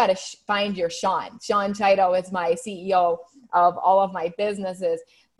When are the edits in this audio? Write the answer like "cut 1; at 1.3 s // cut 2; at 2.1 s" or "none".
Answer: none